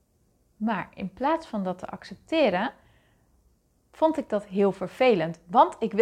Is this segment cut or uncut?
uncut